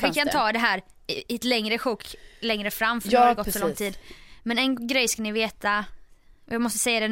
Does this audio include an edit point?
no; 0 cuts

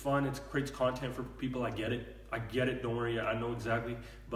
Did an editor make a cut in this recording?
no; 0 cuts

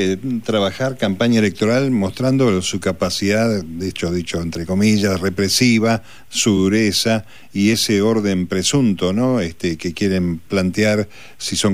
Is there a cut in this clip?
no; 0 cuts

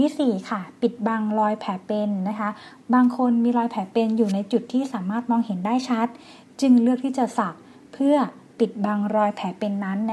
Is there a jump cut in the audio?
no; 0 cuts

